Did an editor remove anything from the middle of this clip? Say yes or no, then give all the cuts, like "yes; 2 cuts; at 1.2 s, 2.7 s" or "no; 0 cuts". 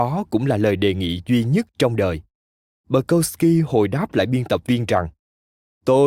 no; 0 cuts